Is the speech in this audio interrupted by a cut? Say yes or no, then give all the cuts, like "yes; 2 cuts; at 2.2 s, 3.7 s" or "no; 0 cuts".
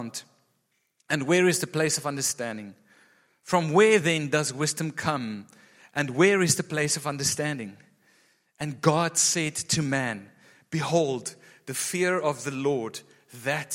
no; 0 cuts